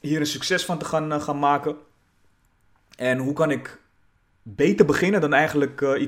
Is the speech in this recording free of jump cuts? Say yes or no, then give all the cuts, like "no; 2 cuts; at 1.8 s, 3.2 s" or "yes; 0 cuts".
yes; 0 cuts